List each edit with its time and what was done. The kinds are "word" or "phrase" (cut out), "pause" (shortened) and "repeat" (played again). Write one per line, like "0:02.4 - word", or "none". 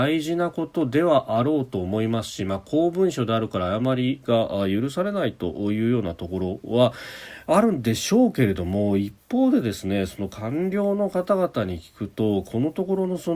none